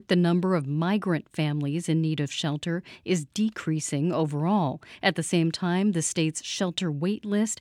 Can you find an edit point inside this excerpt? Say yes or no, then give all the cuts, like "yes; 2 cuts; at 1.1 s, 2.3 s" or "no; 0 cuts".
no; 0 cuts